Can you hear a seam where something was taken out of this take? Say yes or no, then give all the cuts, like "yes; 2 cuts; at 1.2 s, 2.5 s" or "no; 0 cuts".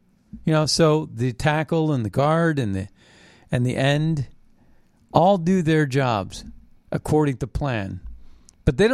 no; 0 cuts